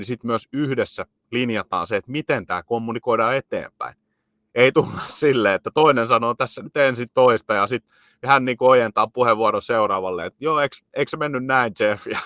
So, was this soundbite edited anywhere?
no; 0 cuts

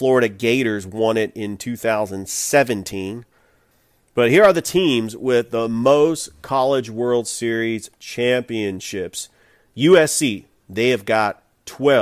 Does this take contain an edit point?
no; 0 cuts

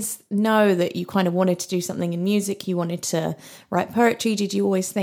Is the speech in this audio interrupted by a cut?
no; 0 cuts

